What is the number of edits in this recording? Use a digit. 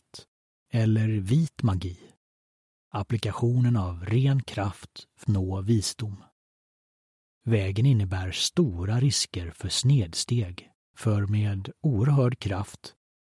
1